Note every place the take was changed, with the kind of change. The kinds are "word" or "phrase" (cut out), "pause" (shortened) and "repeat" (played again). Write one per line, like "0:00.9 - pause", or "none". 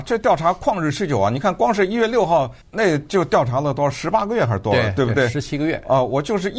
0:02.6 - pause